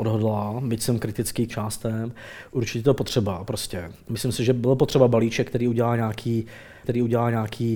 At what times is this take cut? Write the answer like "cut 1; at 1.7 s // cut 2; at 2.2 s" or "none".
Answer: cut 1; at 1.5 s // cut 2; at 6.8 s